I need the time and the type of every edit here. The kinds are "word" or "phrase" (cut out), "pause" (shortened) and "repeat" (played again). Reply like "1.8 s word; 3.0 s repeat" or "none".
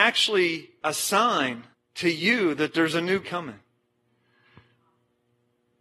1.7 s pause; 3.2 s word